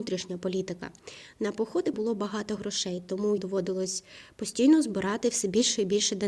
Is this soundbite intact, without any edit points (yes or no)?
no